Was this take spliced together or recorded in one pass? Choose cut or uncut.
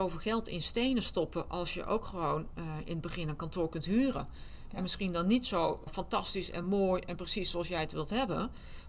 uncut